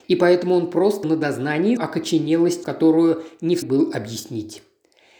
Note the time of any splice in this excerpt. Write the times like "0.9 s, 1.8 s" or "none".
1.0 s, 1.8 s, 2.6 s, 3.6 s

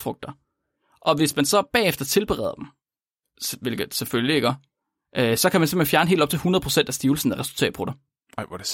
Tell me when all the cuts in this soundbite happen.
none

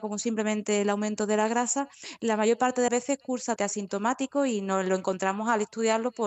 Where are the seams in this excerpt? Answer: 2.9 s, 3.6 s

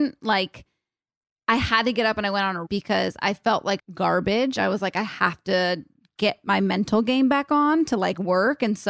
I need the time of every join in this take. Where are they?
2.7 s, 3.8 s

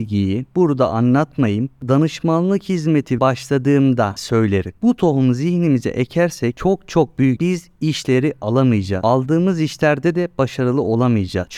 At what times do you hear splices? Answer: 3.2 s, 4.2 s, 7.4 s

